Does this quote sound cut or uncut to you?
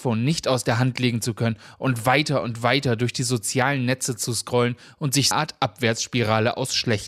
cut